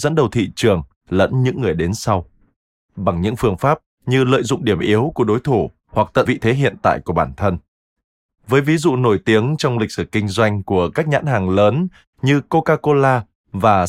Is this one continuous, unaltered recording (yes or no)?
no